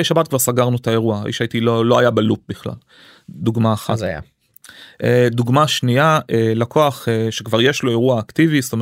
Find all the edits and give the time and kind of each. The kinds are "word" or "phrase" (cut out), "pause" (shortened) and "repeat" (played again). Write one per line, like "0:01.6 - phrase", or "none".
none